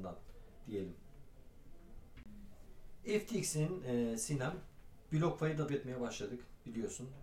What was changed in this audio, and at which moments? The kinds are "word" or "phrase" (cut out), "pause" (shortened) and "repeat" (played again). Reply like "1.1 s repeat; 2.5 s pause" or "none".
5.1 s phrase; 5.7 s word